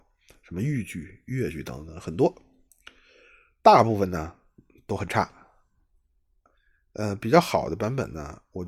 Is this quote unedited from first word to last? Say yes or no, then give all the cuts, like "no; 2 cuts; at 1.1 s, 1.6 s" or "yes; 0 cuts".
yes; 0 cuts